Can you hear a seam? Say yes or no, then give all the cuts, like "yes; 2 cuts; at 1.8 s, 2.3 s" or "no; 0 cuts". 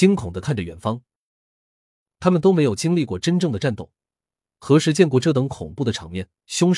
no; 0 cuts